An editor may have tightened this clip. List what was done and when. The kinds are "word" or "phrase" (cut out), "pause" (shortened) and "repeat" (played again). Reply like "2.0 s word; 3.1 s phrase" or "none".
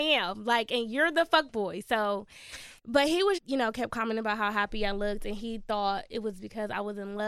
2.8 s pause; 3.4 s word

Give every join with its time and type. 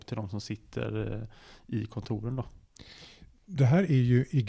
none

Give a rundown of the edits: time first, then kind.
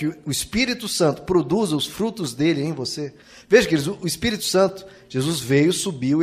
3.2 s pause

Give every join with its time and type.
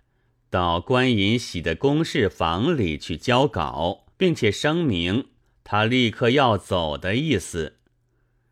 4.1 s pause

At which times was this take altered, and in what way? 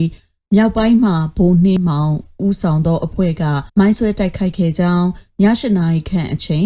3.7 s pause

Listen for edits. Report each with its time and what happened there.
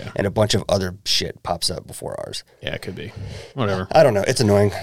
1.8 s word; 3.5 s pause

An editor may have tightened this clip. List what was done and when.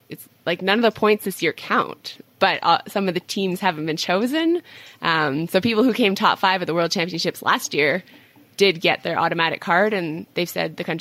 none

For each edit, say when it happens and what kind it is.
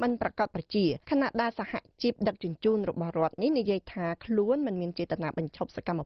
1.0 s pause

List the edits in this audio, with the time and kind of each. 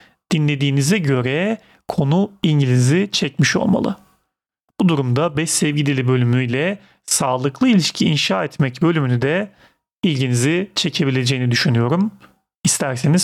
none

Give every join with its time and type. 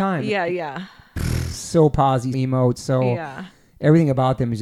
2.3 s word

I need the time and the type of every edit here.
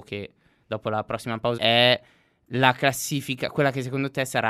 1.6 s word

